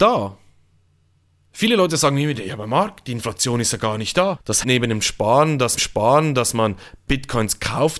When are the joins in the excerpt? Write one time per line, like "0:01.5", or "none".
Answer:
0:04.6
0:05.8